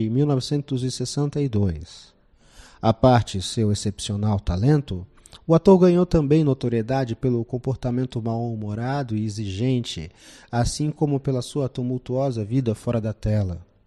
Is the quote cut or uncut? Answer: uncut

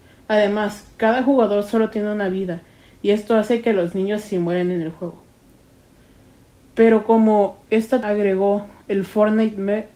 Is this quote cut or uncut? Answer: cut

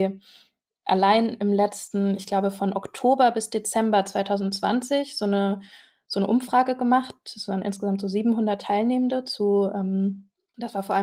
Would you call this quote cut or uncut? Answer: uncut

